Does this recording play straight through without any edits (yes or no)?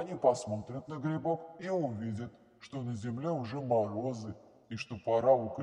yes